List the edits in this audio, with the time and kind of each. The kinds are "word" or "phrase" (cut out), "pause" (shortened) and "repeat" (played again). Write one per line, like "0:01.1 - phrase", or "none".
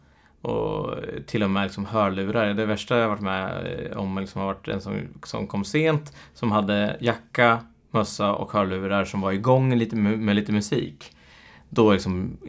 none